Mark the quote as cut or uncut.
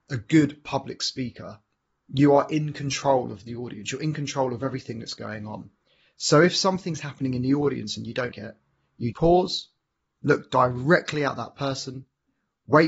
cut